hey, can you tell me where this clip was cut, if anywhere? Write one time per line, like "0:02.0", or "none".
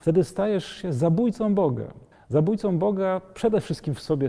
0:02.1